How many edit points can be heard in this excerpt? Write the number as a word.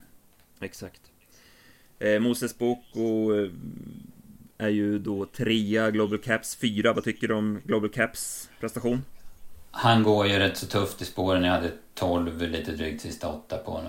zero